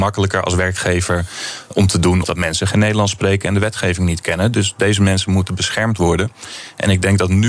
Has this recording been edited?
yes; 1 cut; at 2.2 s

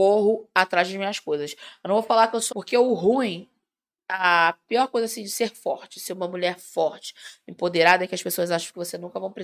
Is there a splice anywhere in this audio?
yes; 1 cut; at 2.5 s

